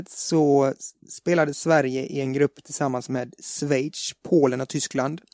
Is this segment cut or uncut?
uncut